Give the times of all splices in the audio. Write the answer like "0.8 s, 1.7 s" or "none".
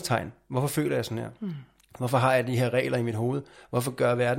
none